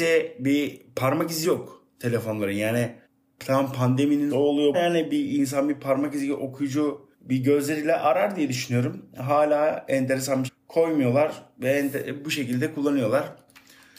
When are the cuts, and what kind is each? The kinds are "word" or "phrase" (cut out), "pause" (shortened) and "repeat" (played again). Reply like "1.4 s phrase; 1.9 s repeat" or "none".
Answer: 1.4 s word; 3.0 s pause; 4.3 s word; 4.7 s phrase; 7.1 s pause; 10.5 s phrase